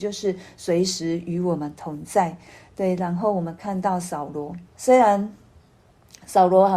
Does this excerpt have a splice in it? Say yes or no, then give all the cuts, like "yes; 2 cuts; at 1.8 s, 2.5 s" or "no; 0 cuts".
yes; 1 cut; at 4.7 s